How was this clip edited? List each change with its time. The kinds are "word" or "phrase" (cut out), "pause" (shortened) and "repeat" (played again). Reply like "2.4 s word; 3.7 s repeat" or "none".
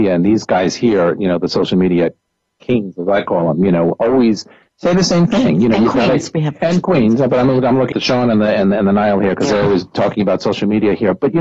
4.7 s pause; 7.9 s word